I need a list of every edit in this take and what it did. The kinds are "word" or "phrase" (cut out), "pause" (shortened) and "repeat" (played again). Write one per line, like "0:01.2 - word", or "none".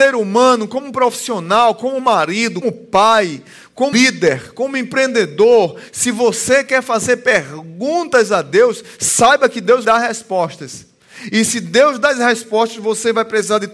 0:02.6 - word
0:03.9 - word
0:09.8 - word

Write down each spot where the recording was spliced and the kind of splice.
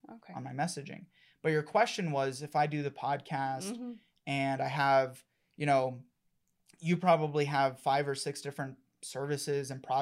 none

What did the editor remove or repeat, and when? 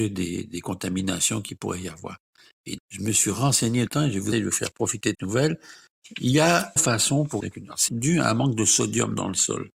0:02.8 - word
0:03.9 - word
0:04.3 - word
0:05.1 - word
0:06.8 - word
0:07.4 - word
0:07.9 - word

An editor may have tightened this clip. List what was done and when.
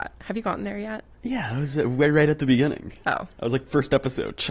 none

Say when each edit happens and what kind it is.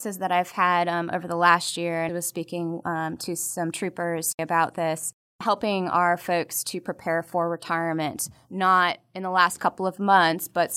0:02.1 - word

